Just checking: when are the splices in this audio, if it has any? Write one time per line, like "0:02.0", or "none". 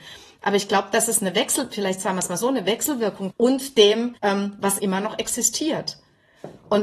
0:03.3
0:04.2
0:04.8